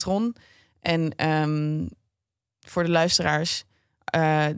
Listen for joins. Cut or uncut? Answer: uncut